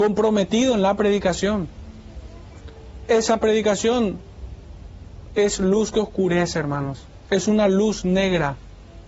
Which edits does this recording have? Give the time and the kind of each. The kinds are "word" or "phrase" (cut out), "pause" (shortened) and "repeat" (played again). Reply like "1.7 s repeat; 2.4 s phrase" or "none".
7.2 s pause